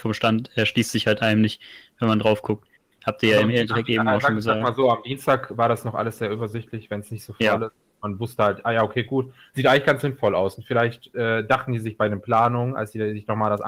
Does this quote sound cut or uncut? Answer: uncut